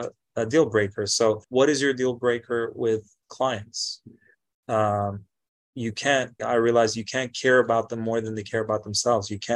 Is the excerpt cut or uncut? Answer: cut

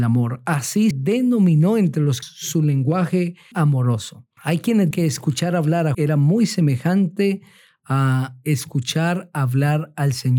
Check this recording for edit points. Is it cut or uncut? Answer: cut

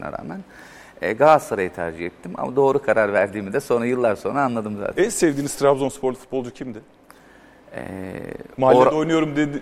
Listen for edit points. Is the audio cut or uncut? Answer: uncut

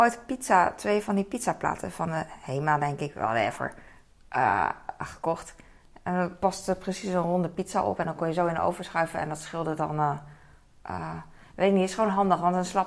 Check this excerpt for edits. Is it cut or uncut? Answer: uncut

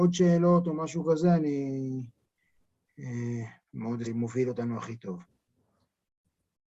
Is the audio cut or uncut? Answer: cut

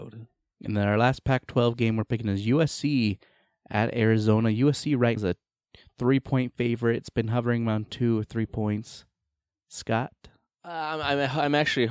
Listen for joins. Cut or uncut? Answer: cut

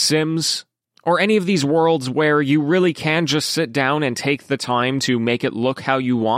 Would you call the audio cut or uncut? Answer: uncut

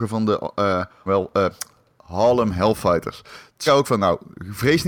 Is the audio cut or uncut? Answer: cut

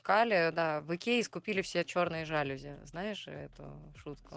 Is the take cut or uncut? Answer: uncut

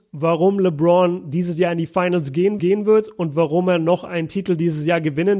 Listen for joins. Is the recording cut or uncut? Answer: cut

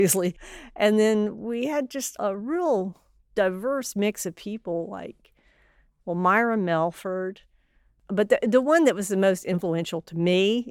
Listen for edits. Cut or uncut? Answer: uncut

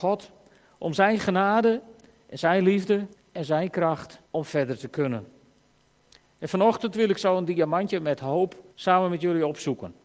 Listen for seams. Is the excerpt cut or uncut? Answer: cut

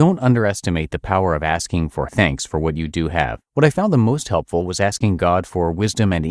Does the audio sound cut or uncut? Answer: cut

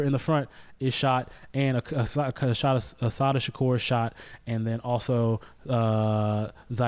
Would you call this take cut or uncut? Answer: uncut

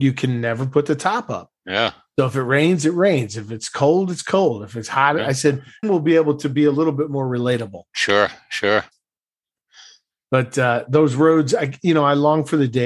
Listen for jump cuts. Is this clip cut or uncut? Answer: cut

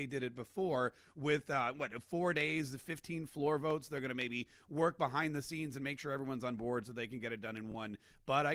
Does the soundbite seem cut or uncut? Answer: uncut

